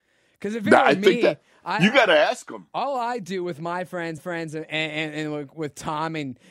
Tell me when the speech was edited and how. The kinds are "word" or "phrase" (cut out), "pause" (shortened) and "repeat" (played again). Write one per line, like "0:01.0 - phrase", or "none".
0:04.2 - repeat